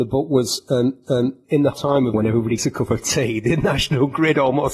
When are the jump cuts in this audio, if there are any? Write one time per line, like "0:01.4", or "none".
0:01.0
0:01.7
0:02.1
0:02.6

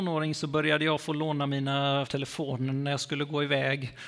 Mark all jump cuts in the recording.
0:02.1

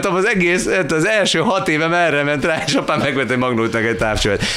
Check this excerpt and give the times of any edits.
none

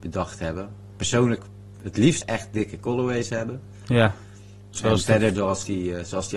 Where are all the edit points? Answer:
0:01.4
0:02.2
0:05.3

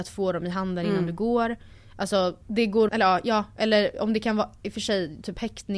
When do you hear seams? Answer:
0:02.4
0:02.9

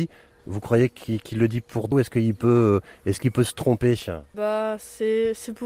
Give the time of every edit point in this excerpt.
0:01.9

